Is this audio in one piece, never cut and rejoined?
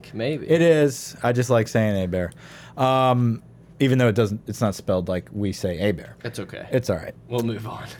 yes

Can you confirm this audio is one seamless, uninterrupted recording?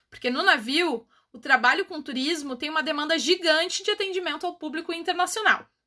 yes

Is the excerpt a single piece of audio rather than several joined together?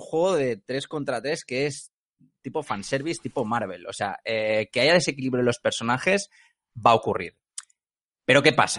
yes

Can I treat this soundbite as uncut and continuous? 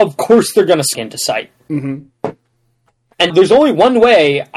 no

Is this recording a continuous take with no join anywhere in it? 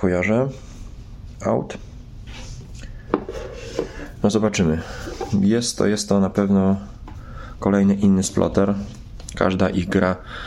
yes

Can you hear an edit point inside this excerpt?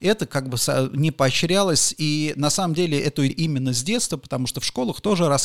yes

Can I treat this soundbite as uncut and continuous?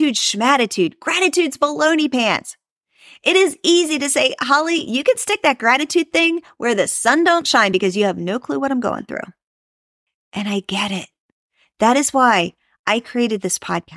yes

